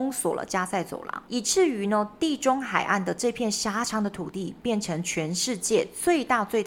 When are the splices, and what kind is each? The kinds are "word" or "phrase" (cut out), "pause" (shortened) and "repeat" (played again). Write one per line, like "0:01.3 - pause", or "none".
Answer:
0:01.3 - pause